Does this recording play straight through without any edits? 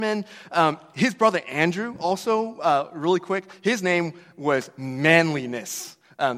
yes; 0 cuts

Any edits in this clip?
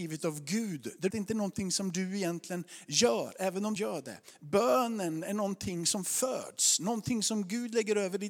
yes; 2 cuts; at 1.1 s, 3.8 s

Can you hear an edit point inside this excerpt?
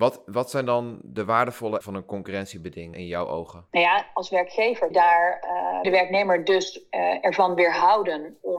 yes; 5 cuts; at 1.8 s, 2.9 s, 3.7 s, 4.9 s, 5.8 s

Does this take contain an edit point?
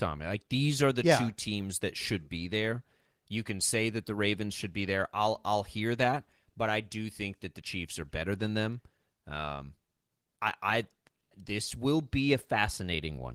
no; 0 cuts

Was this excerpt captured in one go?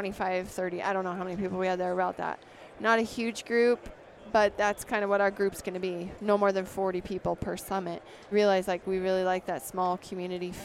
no; 1 cut; at 8.3 s

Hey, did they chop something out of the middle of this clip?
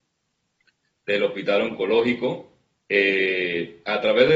no; 0 cuts

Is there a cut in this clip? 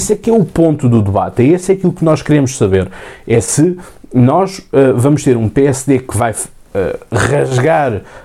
no; 0 cuts

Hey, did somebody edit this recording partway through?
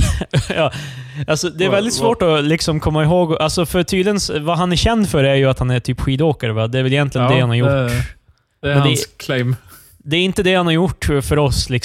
no; 0 cuts

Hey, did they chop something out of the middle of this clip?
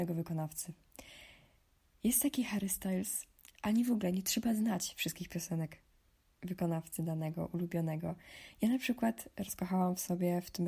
no; 0 cuts

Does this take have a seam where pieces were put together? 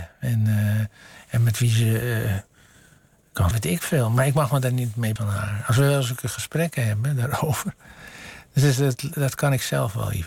yes; 2 cuts; at 3.5 s, 5.2 s

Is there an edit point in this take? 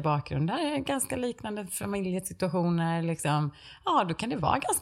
no; 0 cuts

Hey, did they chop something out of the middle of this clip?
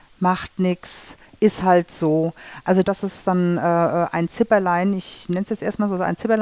yes; 1 cut; at 2.8 s

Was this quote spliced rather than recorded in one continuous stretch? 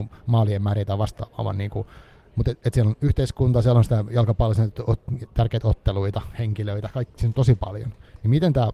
no; 0 cuts

